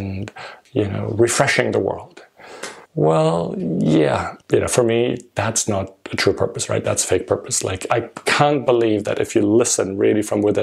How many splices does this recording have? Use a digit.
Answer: 2